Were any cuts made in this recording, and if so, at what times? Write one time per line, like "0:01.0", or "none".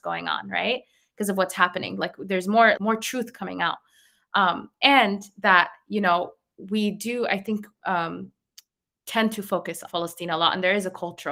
0:02.8
0:09.9

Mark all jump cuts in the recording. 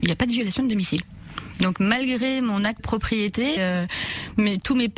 0:02.8
0:03.6

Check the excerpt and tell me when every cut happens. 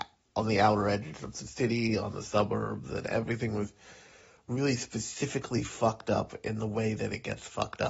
none

